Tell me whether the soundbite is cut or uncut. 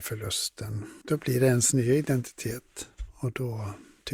uncut